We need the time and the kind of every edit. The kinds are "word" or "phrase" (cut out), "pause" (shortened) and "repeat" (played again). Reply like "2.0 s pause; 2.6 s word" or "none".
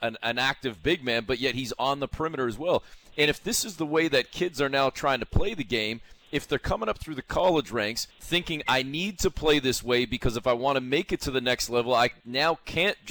8.1 s pause